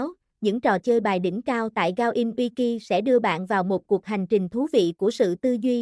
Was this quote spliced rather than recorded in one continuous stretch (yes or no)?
no